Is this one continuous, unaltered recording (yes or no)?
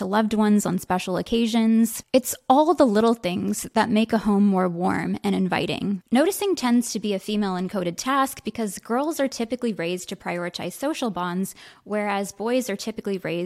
yes